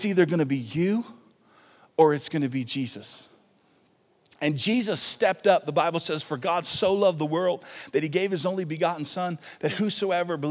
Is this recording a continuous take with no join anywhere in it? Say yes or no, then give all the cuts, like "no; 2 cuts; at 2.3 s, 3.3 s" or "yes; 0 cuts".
yes; 0 cuts